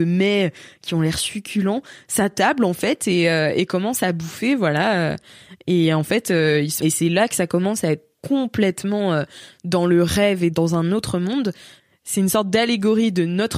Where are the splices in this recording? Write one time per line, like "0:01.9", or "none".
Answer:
0:06.8
0:08.2
0:10.5